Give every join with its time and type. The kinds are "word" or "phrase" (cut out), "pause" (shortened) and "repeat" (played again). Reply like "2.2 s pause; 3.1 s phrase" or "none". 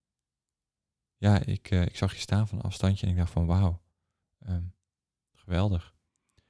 none